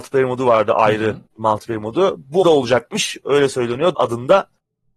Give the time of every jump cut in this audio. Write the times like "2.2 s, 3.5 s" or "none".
1.3 s, 2.4 s, 3.9 s